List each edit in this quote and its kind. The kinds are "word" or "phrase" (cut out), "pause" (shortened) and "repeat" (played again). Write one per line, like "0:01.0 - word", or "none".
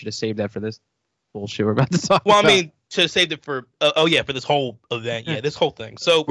none